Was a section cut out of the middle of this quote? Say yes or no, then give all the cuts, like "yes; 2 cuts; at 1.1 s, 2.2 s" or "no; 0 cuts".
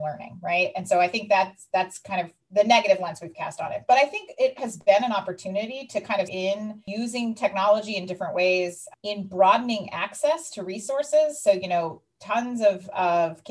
yes; 3 cuts; at 2.4 s, 4.6 s, 6.3 s